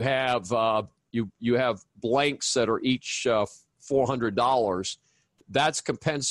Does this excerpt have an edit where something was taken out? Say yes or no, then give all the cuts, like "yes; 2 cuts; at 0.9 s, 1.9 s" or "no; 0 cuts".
no; 0 cuts